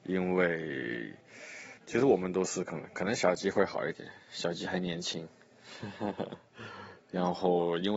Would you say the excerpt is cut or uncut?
cut